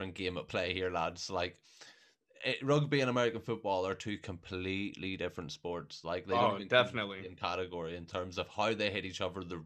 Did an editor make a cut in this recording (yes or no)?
no